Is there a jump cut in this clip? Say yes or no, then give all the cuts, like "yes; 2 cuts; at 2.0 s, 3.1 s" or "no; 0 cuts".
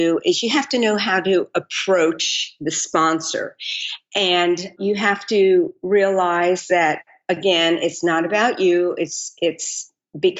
no; 0 cuts